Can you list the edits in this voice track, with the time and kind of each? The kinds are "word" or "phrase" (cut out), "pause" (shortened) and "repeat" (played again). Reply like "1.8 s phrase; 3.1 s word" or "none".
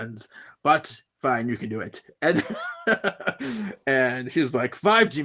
1.1 s pause